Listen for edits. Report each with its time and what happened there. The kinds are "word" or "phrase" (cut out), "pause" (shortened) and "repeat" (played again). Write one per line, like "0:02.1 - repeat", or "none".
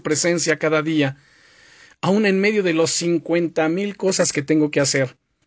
none